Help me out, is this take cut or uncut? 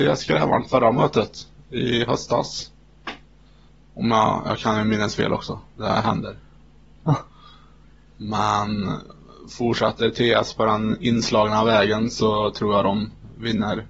cut